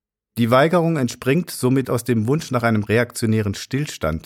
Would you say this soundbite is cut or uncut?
cut